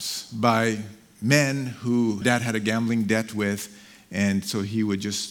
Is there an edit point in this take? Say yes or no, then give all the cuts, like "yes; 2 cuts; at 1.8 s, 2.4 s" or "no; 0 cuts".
yes; 1 cut; at 2.2 s